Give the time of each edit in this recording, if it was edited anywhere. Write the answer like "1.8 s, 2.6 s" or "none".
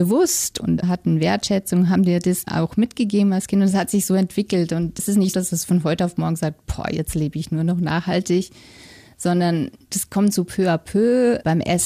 2.5 s, 5.3 s